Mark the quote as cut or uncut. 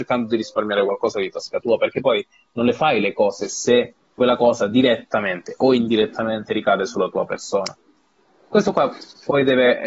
uncut